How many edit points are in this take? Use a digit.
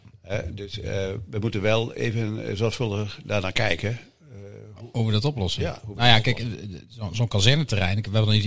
0